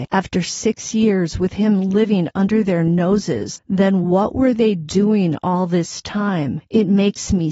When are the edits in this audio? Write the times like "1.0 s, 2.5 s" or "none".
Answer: none